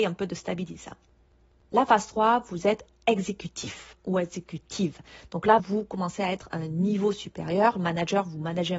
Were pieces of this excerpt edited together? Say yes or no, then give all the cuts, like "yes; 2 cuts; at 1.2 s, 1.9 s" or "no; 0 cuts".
yes; 1 cut; at 5.6 s